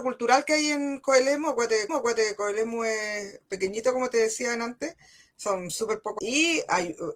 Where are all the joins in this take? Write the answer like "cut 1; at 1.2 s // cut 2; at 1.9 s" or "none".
cut 1; at 1.9 s // cut 2; at 6.2 s